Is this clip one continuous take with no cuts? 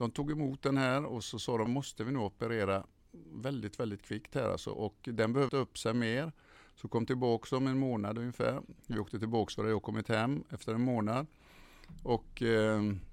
no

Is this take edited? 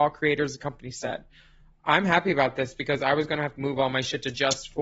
yes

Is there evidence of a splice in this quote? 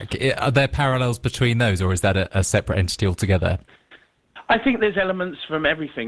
no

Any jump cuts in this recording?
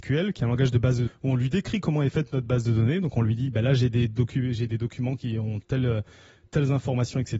yes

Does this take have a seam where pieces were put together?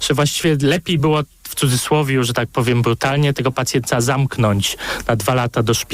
no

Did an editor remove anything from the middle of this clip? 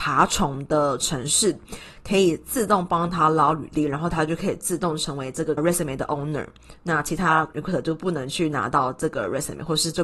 yes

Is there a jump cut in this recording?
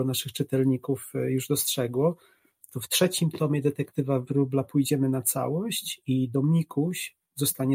no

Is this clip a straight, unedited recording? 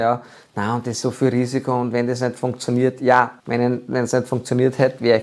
no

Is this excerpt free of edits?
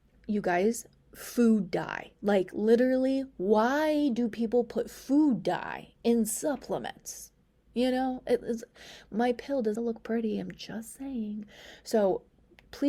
no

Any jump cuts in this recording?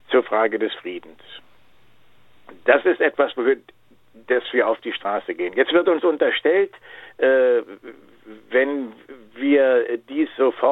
no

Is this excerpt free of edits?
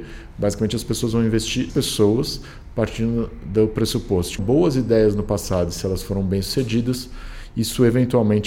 no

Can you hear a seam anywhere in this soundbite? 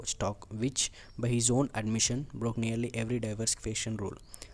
no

